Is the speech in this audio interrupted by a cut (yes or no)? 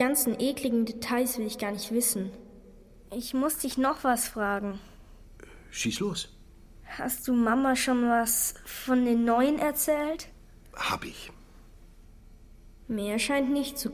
no